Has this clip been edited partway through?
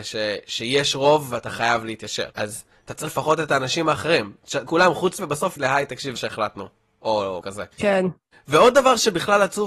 yes; 8 cuts; at 2.3 s, 3.1 s, 4.7 s, 5.2 s, 5.6 s, 6.2 s, 7.4 s, 7.7 s

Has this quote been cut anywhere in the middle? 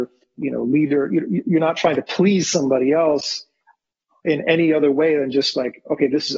no; 0 cuts

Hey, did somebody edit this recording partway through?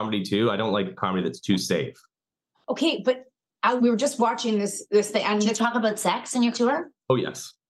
yes; 2 cuts; at 3.8 s, 6.5 s

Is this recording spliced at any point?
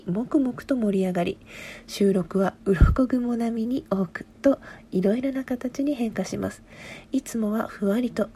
no; 0 cuts

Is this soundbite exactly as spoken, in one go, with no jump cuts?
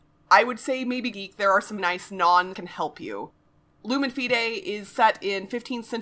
no; 3 cuts; at 1.1 s, 1.8 s, 2.5 s

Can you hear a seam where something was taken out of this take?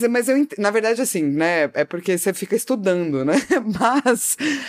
no; 0 cuts

